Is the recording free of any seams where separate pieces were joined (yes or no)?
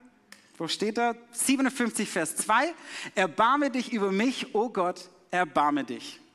yes